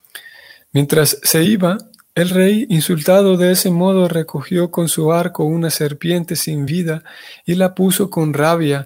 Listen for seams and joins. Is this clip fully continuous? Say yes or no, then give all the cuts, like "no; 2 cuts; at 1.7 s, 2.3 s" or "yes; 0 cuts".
yes; 0 cuts